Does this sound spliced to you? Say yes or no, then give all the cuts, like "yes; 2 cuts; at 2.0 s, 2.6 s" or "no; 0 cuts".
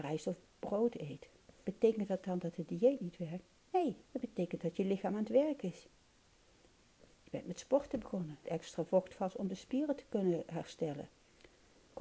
yes; 2 cuts; at 4.1 s, 8.4 s